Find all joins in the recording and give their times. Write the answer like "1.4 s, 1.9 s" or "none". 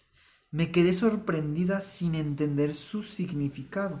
none